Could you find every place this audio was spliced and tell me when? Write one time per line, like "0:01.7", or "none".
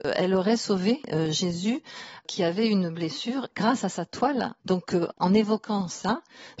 0:04.6